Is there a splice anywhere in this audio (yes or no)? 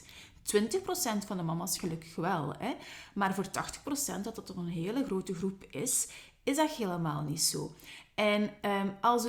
no